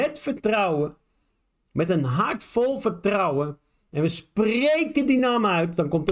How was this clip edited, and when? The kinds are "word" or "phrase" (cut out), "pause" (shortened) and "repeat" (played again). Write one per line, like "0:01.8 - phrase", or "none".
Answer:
none